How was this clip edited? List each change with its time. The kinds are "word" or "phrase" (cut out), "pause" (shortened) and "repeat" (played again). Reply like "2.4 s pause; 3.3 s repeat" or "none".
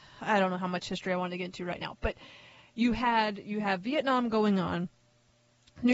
none